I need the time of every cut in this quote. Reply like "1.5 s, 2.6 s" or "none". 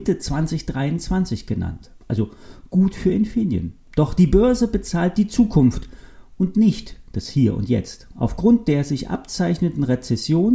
2.0 s

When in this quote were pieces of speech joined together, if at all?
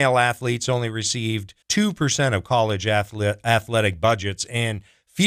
1.6 s

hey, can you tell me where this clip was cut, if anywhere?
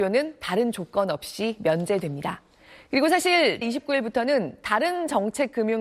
3.6 s

